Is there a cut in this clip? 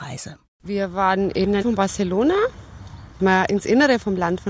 yes; 2 cuts; at 1.6 s, 3.5 s

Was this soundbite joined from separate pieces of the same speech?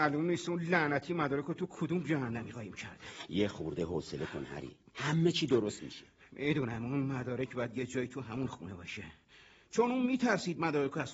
no; 0 cuts

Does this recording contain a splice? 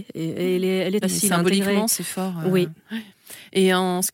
yes; 1 cut; at 1.0 s

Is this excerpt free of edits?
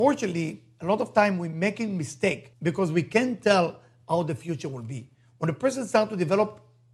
no; 1 cut; at 2.5 s

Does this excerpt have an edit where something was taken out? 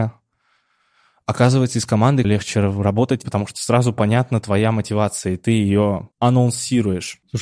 yes; 3 cuts; at 2.2 s, 3.2 s, 6.1 s

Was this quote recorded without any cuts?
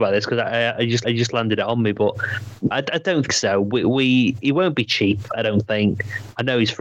no; 3 cuts; at 1.0 s, 2.7 s, 3.3 s

